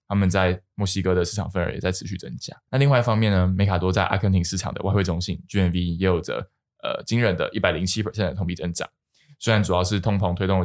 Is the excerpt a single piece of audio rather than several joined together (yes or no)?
yes